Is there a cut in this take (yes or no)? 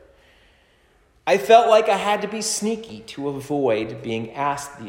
no